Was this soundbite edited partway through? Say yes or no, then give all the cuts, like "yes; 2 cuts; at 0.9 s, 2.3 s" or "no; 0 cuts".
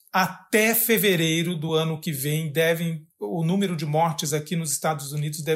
no; 0 cuts